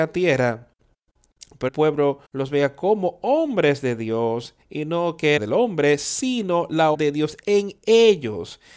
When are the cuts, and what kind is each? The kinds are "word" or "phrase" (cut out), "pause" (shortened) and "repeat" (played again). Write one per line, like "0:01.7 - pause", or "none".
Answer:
0:01.7 - word
0:02.2 - pause
0:04.6 - pause
0:05.4 - phrase
0:06.9 - word